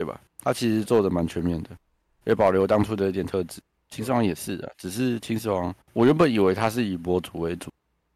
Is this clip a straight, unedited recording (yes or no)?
no